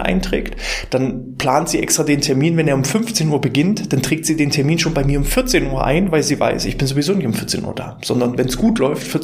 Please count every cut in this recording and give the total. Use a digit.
0